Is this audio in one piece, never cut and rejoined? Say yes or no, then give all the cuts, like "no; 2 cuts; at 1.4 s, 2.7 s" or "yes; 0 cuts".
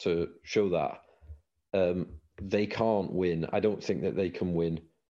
yes; 0 cuts